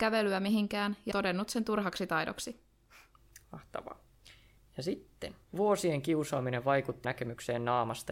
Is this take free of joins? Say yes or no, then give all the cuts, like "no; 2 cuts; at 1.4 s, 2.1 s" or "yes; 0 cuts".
no; 4 cuts; at 1.1 s, 3.4 s, 5.4 s, 7.0 s